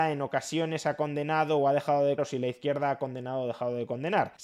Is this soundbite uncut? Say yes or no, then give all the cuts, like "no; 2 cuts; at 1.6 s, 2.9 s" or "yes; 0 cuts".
no; 1 cut; at 2.2 s